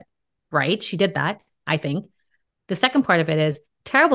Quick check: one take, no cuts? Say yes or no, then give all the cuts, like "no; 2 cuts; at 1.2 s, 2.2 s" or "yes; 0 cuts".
yes; 0 cuts